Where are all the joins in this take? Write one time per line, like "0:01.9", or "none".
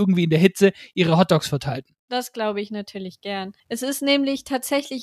0:03.6